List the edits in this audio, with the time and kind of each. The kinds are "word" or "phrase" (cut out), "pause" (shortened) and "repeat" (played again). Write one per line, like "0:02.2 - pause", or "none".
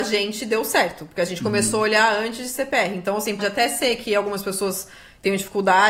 0:03.4 - word